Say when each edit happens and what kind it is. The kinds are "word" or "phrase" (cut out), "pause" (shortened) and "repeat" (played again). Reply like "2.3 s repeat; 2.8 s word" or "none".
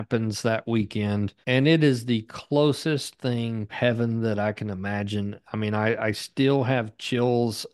1.4 s pause; 3.7 s word